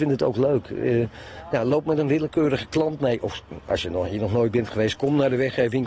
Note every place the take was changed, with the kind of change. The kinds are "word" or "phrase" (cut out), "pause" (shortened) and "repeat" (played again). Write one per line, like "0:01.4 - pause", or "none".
none

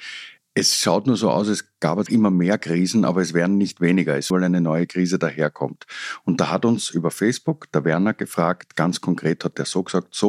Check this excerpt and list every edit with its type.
0:02.1 - word
0:04.3 - phrase

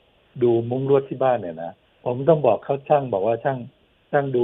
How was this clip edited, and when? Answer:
0:01.8 - pause

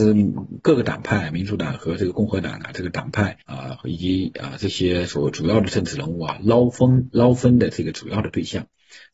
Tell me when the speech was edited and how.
0:03.4 - pause

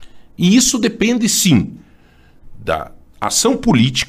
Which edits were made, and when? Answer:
none

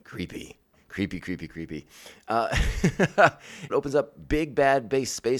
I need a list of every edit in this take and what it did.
0:03.7 - phrase

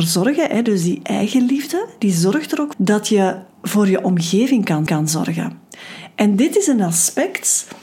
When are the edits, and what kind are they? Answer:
0:02.7 - word
0:03.5 - pause
0:04.9 - repeat

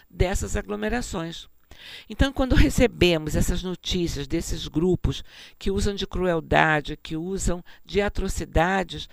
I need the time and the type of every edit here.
none

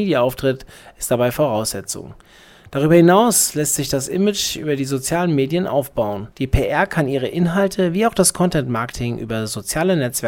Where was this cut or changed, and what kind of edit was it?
0:06.3 - pause

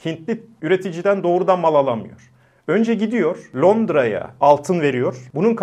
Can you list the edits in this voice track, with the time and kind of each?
none

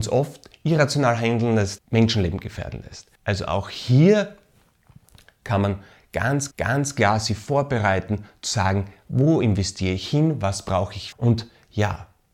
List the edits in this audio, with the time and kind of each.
0:01.8 - word
0:03.1 - pause
0:06.5 - repeat
0:11.1 - word

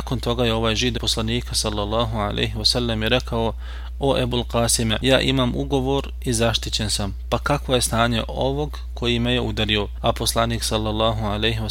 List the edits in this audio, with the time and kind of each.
0:01.0 - phrase

